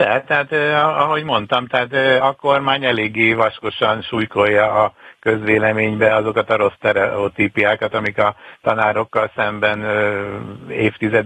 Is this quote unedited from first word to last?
no; 1 cut; at 2.2 s

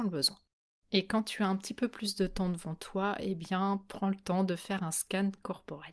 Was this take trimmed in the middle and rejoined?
no; 0 cuts

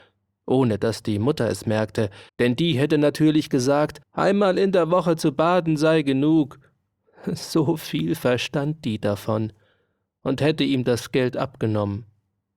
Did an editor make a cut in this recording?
yes; 2 cuts; at 2.3 s, 4.0 s

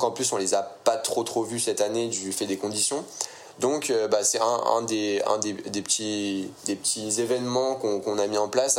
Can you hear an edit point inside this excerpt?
no; 0 cuts

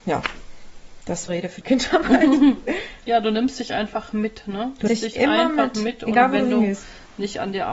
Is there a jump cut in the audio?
yes; 3 cuts; at 1.3 s, 1.6 s, 4.9 s

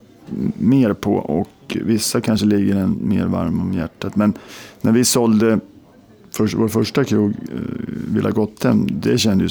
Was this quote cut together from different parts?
no; 0 cuts

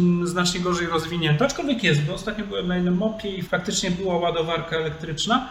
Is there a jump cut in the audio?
yes; 1 cut; at 3.4 s

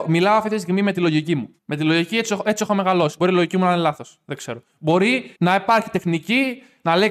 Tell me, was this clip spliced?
yes; 2 cuts; at 1.6 s, 5.3 s

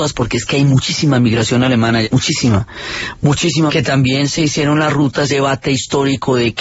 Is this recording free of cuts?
no; 3 cuts; at 2.0 s, 3.7 s, 5.3 s

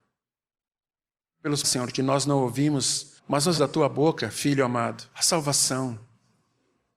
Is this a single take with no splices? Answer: no; 4 cuts; at 1.6 s, 3.2 s, 3.6 s, 5.1 s

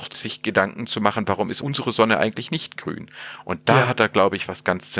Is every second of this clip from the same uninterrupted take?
yes; 0 cuts

